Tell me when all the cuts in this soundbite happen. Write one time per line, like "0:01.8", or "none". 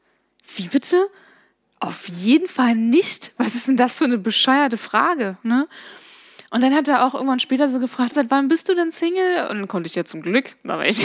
0:08.1